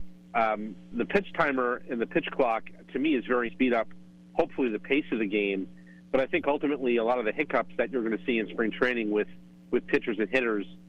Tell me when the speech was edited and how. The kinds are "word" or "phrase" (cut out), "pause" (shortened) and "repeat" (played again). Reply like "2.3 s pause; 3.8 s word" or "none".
0.9 s word; 3.5 s phrase